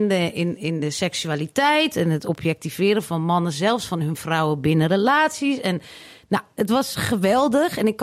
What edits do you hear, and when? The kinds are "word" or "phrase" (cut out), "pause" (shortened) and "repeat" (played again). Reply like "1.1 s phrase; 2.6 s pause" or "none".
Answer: none